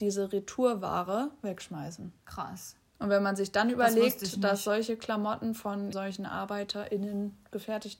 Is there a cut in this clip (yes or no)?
yes